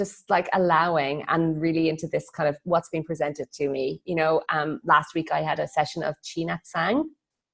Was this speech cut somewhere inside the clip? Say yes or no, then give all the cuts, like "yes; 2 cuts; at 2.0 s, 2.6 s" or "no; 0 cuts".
no; 0 cuts